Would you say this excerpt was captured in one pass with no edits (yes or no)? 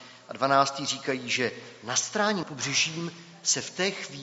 no